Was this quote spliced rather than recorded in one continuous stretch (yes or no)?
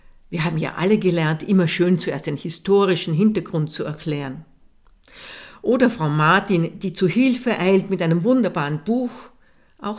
no